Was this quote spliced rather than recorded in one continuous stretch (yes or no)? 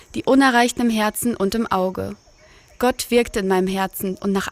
no